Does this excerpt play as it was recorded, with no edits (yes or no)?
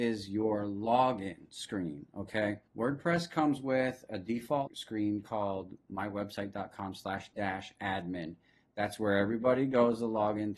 no